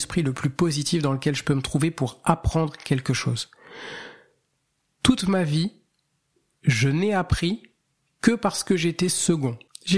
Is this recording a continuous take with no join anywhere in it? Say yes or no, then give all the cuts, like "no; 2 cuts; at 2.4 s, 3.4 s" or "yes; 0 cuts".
yes; 0 cuts